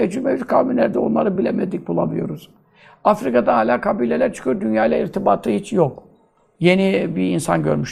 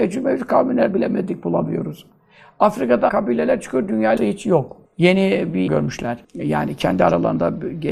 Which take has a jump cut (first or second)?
second